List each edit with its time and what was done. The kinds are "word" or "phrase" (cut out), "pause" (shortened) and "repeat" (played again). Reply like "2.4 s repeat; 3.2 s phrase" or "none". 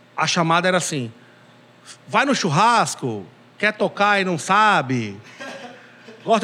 none